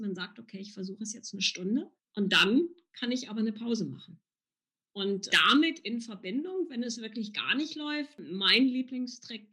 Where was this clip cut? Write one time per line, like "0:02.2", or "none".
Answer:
0:02.0